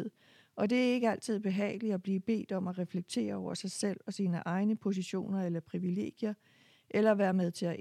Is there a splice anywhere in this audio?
no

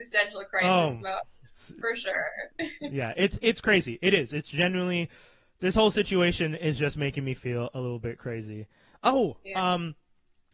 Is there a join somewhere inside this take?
no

